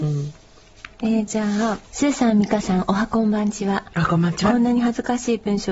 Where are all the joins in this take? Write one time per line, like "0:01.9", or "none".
0:00.9
0:01.3
0:01.9